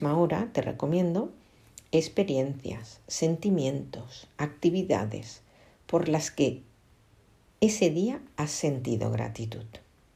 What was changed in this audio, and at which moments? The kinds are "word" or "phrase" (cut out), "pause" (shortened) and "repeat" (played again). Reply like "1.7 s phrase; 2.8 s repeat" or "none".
none